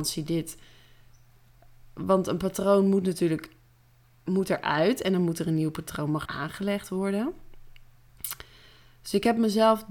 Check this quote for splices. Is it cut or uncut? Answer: cut